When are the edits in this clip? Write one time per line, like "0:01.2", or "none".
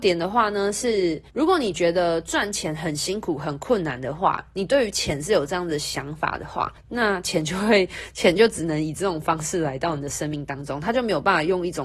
0:01.3
0:06.8